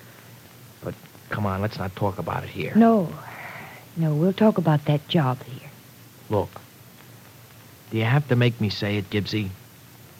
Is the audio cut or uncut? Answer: uncut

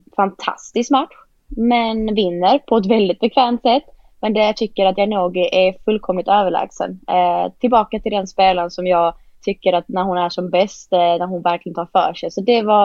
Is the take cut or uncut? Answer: uncut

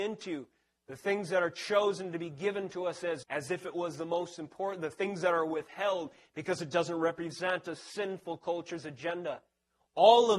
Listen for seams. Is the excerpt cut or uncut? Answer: cut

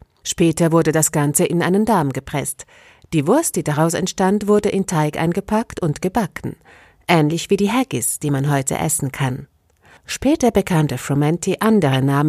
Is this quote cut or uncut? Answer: uncut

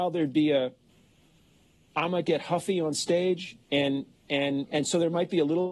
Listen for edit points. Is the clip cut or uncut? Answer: cut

